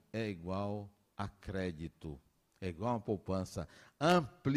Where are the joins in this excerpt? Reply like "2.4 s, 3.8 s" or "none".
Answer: none